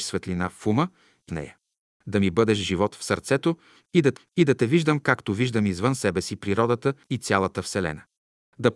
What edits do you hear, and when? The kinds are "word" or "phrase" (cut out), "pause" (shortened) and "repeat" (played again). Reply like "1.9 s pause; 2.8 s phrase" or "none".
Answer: 1.3 s phrase; 4.2 s repeat; 7.0 s pause